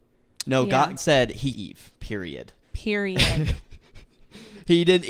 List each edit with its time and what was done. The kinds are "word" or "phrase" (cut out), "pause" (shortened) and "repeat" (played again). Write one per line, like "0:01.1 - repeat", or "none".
0:01.0 - word
0:01.5 - word
0:02.6 - pause